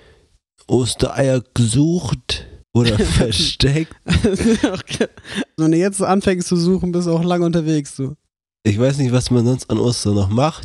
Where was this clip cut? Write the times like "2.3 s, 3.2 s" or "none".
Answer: 2.6 s, 5.6 s